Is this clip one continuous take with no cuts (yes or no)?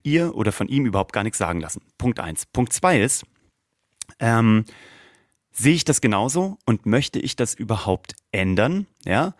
yes